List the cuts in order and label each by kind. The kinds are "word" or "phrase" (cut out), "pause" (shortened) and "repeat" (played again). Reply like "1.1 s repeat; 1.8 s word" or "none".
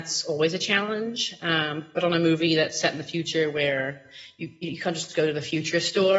none